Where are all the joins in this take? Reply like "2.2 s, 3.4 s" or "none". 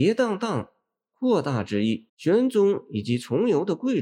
2.1 s